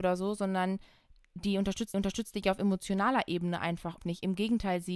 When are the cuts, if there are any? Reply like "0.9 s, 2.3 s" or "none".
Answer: 1.9 s, 4.0 s